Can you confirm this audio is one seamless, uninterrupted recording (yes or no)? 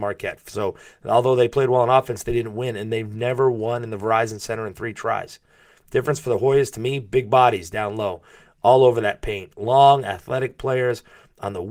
yes